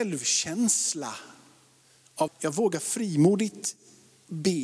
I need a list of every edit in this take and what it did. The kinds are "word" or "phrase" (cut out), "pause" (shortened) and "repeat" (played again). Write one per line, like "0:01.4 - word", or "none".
0:02.3 - word